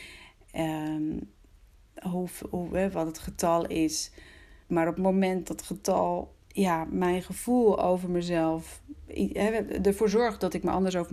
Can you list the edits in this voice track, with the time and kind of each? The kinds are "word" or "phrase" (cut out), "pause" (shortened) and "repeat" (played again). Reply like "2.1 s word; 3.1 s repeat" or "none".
1.7 s pause; 4.6 s pause; 5.5 s word; 6.4 s pause